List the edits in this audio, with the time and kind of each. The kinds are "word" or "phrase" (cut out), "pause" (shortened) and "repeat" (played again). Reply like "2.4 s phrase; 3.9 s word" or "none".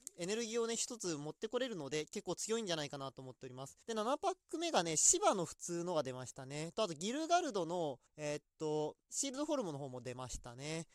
3.8 s pause; 8.1 s pause; 9.0 s pause